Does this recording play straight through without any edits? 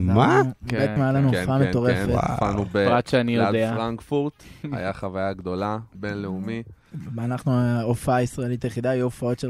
no; 2 cuts; at 1.0 s, 5.9 s

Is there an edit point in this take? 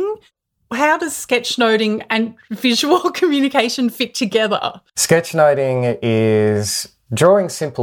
yes; 1 cut; at 4.9 s

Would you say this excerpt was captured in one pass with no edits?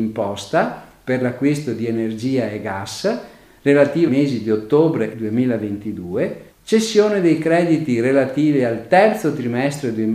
no; 3 cuts; at 4.1 s, 5.1 s, 6.5 s

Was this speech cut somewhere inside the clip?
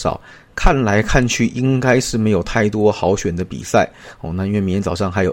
no; 0 cuts

